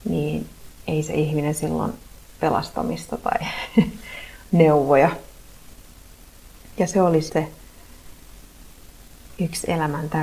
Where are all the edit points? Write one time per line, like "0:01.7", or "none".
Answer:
0:02.4
0:07.3